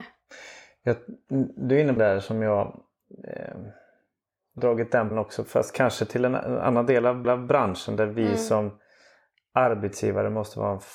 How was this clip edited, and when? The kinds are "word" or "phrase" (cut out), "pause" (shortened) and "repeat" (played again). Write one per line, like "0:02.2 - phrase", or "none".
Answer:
0:02.0 - word
0:04.6 - word
0:05.1 - word
0:07.2 - repeat